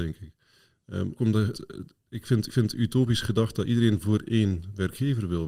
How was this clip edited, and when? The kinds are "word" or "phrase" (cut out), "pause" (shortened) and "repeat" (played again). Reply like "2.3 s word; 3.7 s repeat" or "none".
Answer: 1.2 s word; 1.5 s word; 2.5 s repeat